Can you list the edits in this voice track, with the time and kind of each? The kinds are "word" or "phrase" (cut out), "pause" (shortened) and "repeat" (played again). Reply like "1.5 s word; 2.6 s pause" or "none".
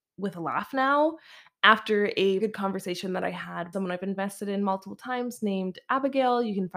2.4 s word; 3.7 s phrase